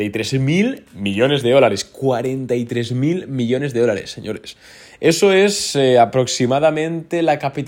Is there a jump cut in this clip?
no; 0 cuts

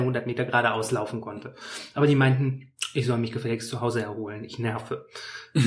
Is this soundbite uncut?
yes; 0 cuts

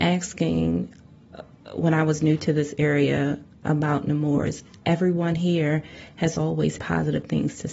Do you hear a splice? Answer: yes; 1 cut; at 6.8 s

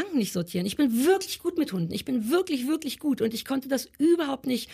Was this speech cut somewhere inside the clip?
no; 0 cuts

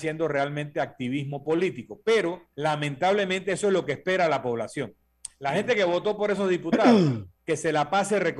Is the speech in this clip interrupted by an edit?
yes; 2 cuts; at 2.5 s, 7.4 s

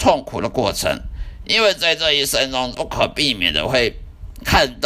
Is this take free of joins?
no; 1 cut; at 2.7 s

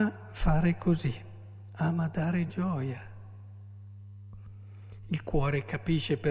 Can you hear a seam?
no; 0 cuts

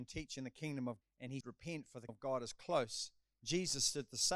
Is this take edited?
yes; 3 cuts; at 1.0 s, 1.4 s, 2.1 s

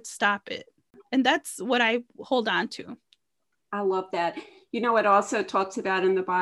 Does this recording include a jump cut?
no; 0 cuts

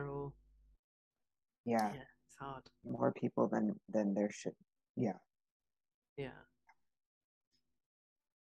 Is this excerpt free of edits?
yes; 0 cuts

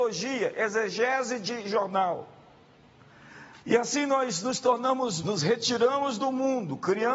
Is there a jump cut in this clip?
yes; 2 cuts; at 3.6 s, 5.2 s

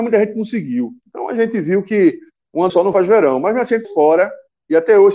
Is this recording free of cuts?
no; 2 cuts; at 2.7 s, 3.8 s

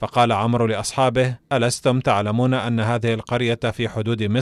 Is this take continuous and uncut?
no; 1 cut; at 1.4 s

